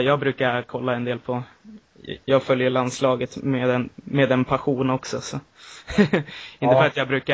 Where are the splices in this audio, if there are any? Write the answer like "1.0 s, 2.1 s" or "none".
none

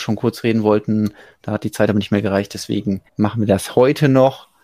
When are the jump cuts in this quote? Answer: 3.1 s

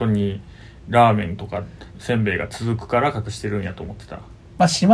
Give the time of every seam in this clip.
1.9 s

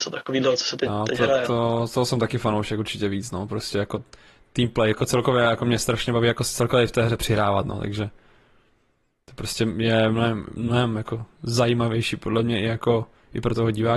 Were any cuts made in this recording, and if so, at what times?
10.6 s

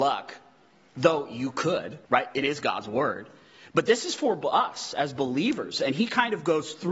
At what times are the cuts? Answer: 2.0 s

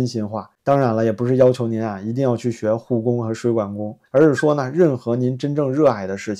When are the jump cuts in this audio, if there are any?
4.1 s

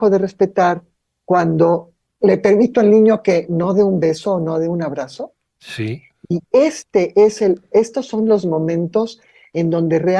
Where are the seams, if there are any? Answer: none

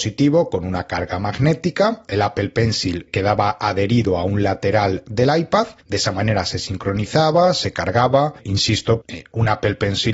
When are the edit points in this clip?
2.1 s, 5.8 s, 9.0 s

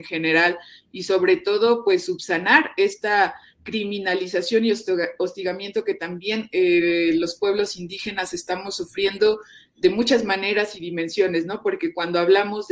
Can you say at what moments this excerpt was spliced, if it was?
none

